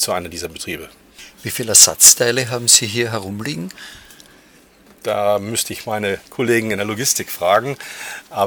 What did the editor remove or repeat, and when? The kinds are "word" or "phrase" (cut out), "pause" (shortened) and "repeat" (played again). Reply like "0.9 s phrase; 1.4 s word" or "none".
none